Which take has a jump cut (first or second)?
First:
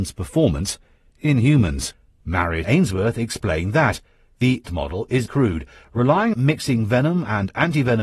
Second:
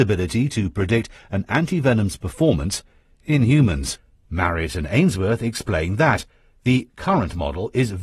first